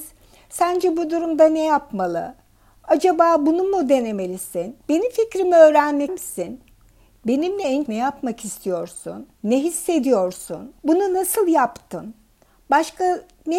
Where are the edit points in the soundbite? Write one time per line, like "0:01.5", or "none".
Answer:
0:04.8
0:06.1
0:07.9
0:09.3
0:10.8